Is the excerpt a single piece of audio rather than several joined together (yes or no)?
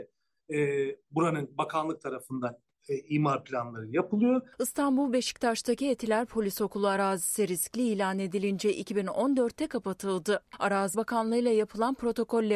no